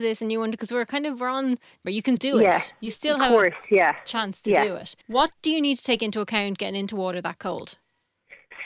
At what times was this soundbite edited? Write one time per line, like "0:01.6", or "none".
0:01.8
0:02.2
0:05.0